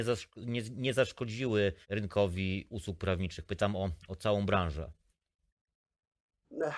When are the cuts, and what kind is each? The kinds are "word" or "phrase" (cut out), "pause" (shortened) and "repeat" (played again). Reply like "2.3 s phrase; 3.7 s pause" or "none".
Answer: 1.8 s pause